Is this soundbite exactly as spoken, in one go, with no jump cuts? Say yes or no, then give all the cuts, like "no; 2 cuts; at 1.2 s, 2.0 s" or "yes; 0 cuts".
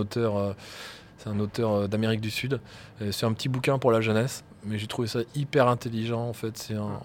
yes; 0 cuts